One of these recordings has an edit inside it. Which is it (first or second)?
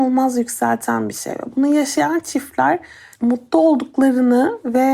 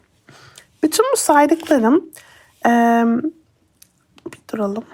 first